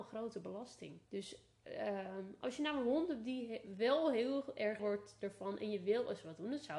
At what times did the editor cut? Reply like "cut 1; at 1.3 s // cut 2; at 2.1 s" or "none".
cut 1; at 1.0 s // cut 2; at 4.8 s